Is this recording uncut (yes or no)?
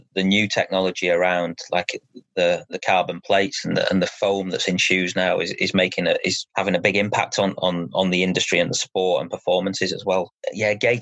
yes